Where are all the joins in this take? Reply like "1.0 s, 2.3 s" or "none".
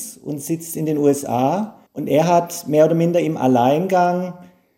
1.9 s